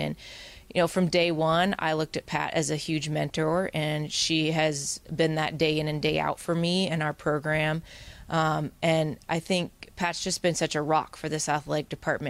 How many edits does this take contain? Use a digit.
0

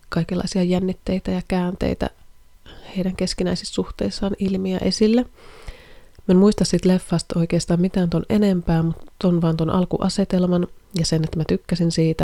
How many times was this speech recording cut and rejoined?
0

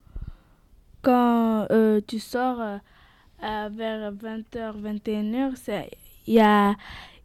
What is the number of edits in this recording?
0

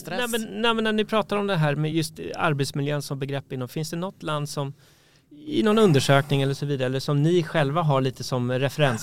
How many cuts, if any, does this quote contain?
0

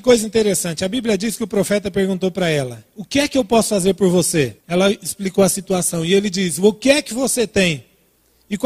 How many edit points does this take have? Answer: 1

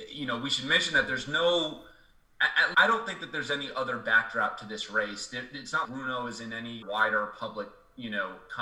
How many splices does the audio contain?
3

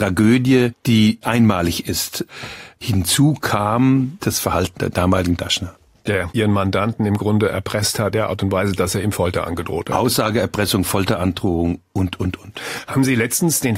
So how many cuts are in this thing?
4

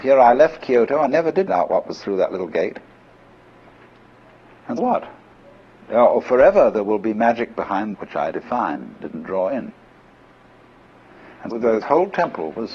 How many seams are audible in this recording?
8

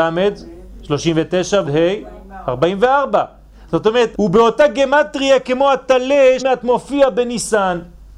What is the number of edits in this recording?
3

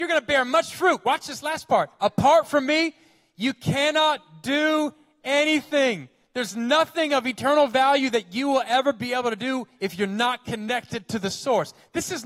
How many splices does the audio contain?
0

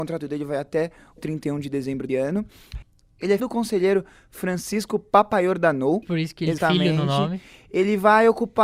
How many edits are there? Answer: 5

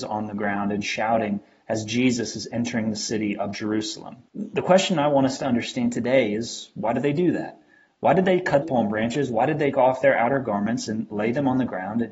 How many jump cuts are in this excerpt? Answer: 3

